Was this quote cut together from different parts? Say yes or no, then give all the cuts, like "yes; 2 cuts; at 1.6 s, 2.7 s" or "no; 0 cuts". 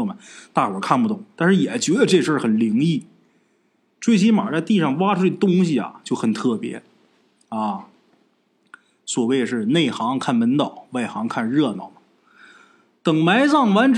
no; 0 cuts